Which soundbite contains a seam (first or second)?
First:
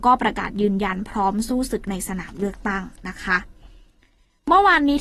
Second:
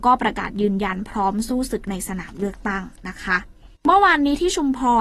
second